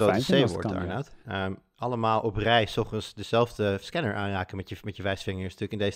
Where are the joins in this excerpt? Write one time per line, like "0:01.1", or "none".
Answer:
0:01.2
0:03.8